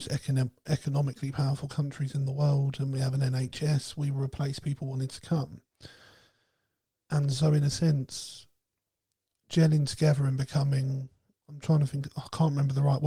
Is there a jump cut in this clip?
no; 0 cuts

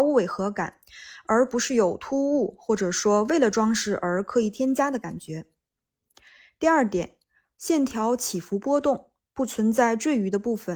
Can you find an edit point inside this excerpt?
no; 0 cuts

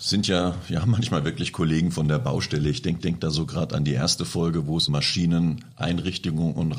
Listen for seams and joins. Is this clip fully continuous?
no; 2 cuts; at 3.0 s, 4.9 s

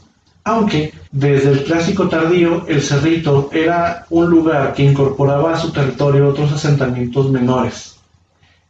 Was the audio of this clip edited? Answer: yes; 1 cut; at 1.1 s

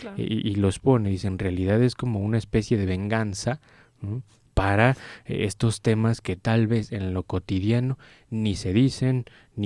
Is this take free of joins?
yes; 0 cuts

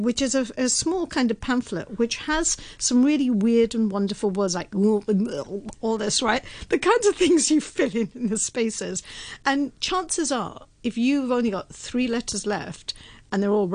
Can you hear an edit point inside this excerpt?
no; 0 cuts

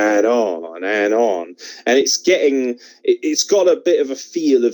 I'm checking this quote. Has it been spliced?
no; 0 cuts

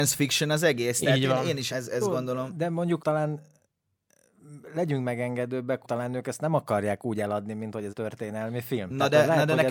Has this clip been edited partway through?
yes; 4 cuts; at 1.7 s, 3.0 s, 5.8 s, 7.9 s

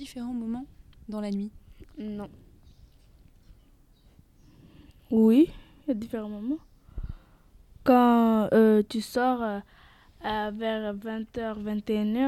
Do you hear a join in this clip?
no; 0 cuts

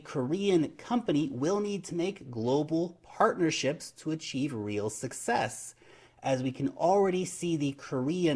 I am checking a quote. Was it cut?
no; 0 cuts

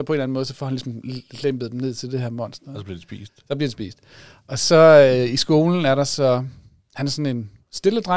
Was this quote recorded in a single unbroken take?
yes; 0 cuts

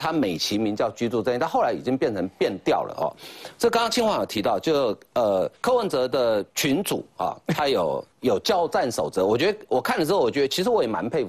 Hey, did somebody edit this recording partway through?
yes; 3 cuts; at 5.6 s, 6.5 s, 8.1 s

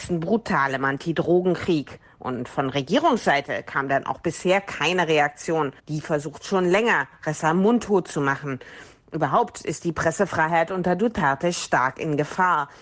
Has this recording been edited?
yes; 1 cut; at 5.8 s

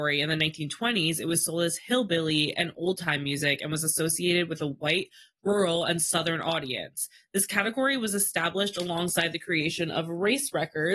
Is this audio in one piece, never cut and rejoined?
yes; 0 cuts

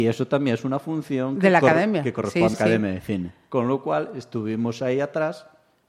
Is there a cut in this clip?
yes; 1 cut; at 2.5 s

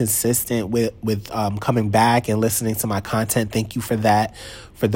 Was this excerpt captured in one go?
yes; 0 cuts

